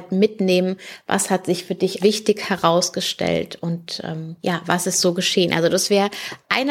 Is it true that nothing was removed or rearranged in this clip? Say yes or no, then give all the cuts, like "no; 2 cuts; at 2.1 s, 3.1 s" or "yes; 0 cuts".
no; 2 cuts; at 2.0 s, 4.4 s